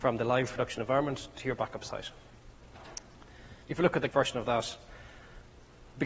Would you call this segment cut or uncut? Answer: cut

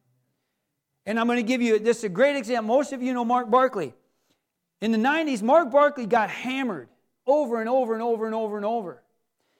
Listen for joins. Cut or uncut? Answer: uncut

